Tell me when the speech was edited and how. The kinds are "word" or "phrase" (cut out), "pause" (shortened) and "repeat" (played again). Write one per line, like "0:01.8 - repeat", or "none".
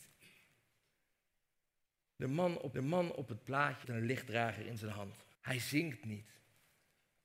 0:02.7 - repeat
0:03.8 - word
0:05.3 - pause